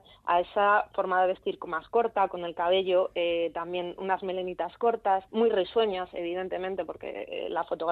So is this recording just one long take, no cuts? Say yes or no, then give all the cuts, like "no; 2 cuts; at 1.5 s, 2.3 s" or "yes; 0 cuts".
no; 1 cut; at 5.3 s